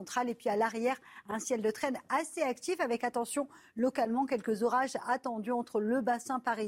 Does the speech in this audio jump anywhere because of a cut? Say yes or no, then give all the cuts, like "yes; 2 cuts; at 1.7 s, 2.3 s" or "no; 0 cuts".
no; 0 cuts